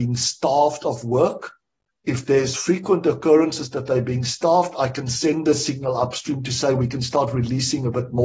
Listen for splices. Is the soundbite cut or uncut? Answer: uncut